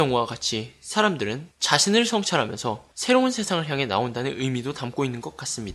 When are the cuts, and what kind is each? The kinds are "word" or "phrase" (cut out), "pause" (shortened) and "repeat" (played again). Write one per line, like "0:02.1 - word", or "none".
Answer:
0:01.5 - pause
0:02.9 - pause